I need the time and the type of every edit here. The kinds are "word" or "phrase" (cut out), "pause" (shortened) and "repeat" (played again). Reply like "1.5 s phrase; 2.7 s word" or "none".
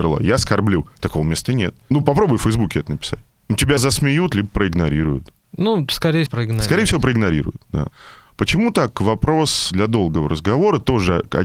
3.8 s word; 6.3 s word